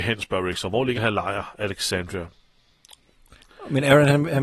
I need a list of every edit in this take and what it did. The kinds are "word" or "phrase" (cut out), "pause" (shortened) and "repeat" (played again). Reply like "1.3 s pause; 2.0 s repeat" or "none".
0.9 s word